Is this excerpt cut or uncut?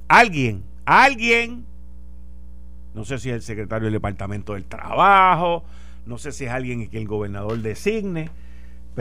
uncut